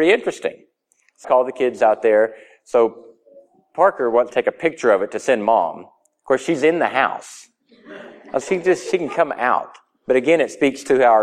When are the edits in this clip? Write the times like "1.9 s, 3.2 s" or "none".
1.2 s, 4.3 s, 8.4 s